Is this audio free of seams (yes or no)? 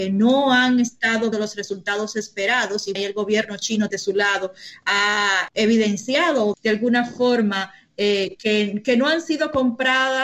no